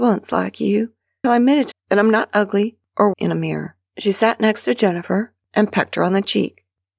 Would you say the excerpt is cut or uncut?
cut